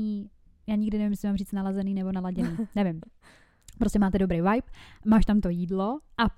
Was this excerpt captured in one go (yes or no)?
yes